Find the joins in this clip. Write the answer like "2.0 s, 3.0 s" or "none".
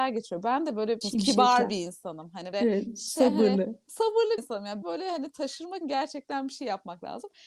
1.0 s, 2.5 s, 4.4 s, 4.8 s, 5.8 s